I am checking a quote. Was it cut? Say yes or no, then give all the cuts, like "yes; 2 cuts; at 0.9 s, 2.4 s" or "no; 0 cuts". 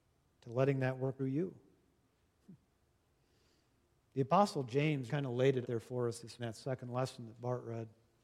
yes; 4 cuts; at 1.2 s, 5.1 s, 5.6 s, 6.4 s